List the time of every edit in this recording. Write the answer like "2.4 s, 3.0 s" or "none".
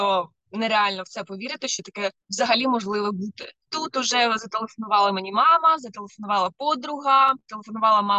2.2 s